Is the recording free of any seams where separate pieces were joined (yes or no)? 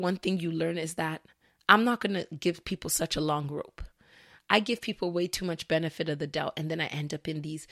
yes